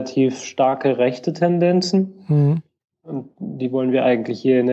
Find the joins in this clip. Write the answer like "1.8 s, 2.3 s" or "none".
none